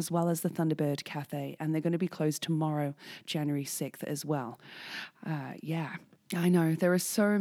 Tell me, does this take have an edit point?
no; 0 cuts

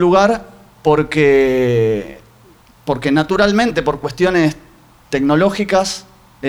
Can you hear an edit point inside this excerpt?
no; 0 cuts

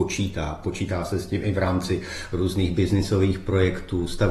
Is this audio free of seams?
yes; 0 cuts

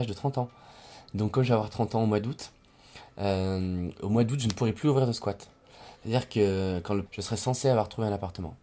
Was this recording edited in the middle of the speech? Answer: yes; 1 cut; at 7.1 s

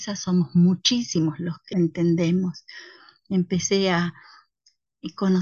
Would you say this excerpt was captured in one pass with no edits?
no; 1 cut; at 1.7 s

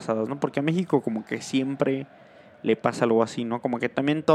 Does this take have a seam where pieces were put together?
no; 0 cuts

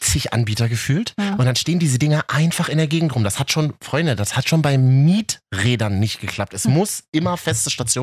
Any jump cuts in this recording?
no; 0 cuts

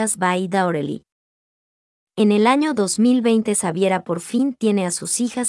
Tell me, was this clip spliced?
no; 0 cuts

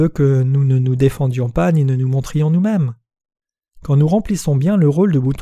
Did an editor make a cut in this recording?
no; 0 cuts

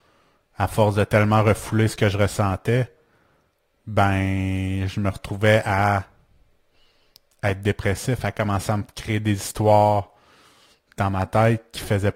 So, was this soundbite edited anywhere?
no; 0 cuts

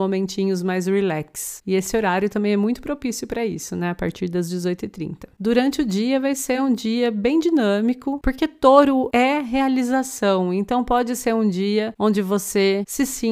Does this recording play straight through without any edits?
yes; 0 cuts

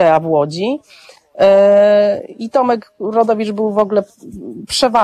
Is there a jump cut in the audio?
no; 0 cuts

